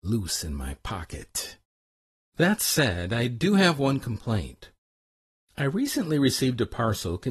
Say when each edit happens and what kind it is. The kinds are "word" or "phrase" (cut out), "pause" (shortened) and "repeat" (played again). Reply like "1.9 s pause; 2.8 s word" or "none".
1.8 s pause